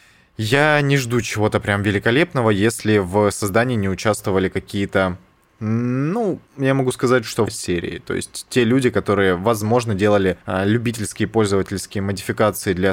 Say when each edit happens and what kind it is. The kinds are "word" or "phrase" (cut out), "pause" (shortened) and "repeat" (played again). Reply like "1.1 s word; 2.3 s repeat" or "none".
6.5 s pause; 7.5 s phrase; 10.4 s pause